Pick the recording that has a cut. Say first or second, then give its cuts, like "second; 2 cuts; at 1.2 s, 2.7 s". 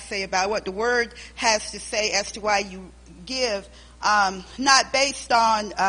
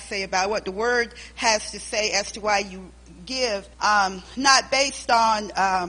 second; 1 cut; at 3.7 s